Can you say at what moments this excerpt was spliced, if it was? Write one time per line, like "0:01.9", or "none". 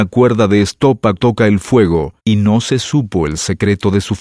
0:01.2
0:02.2